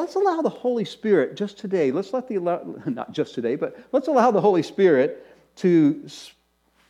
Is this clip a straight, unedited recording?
yes; 0 cuts

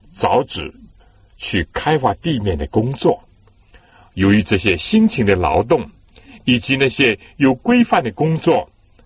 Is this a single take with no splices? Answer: yes; 0 cuts

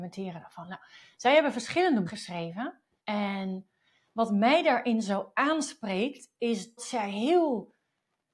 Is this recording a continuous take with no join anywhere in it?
no; 3 cuts; at 2.1 s, 3.0 s, 6.8 s

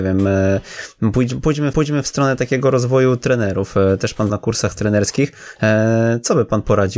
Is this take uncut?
no; 2 cuts; at 1.7 s, 4.3 s

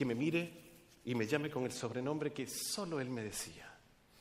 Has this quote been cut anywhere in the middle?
no; 0 cuts

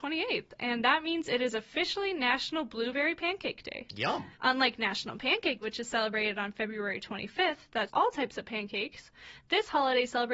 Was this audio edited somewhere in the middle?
yes; 3 cuts; at 4.3 s, 5.6 s, 7.9 s

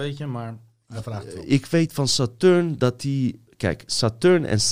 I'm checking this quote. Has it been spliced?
no; 0 cuts

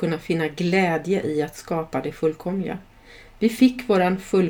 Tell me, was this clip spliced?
no; 0 cuts

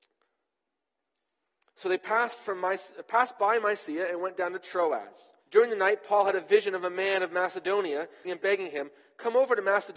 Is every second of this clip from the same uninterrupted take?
no; 2 cuts; at 5.4 s, 8.2 s

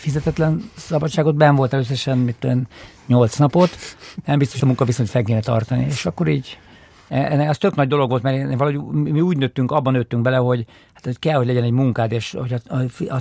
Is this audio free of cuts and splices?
no; 1 cut; at 4.6 s

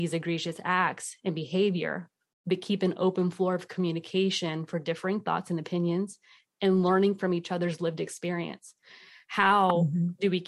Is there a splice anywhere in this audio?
no; 0 cuts

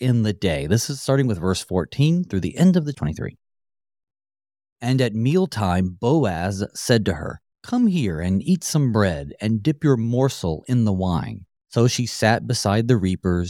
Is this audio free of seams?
no; 3 cuts; at 2.9 s, 7.5 s, 11.6 s

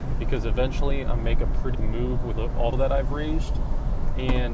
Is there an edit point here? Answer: yes; 4 cuts; at 1.2 s, 1.7 s, 2.4 s, 2.7 s

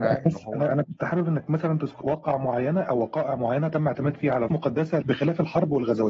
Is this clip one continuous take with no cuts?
no; 3 cuts; at 2.0 s, 4.5 s, 5.0 s

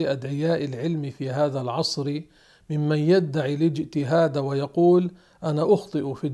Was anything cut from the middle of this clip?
no; 0 cuts

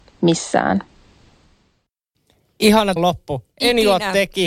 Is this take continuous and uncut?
no; 1 cut; at 3.0 s

